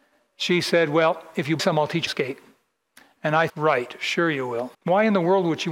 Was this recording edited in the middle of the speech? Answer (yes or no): yes